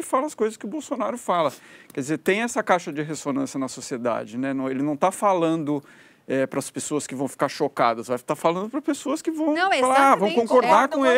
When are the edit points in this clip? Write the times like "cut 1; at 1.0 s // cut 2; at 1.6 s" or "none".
none